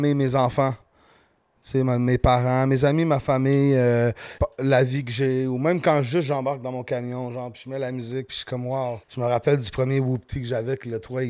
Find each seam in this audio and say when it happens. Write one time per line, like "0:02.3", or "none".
0:04.4
0:09.0